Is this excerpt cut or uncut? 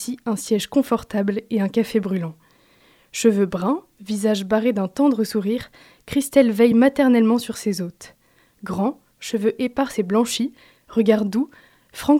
uncut